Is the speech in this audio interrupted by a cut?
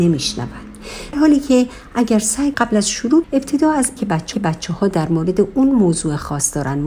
yes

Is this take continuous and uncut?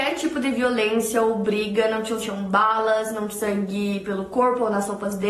no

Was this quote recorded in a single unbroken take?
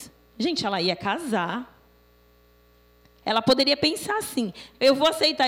yes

